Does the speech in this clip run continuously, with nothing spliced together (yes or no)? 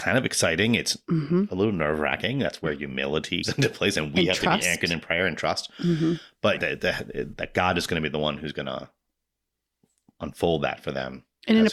no